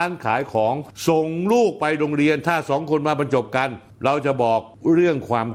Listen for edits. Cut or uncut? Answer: uncut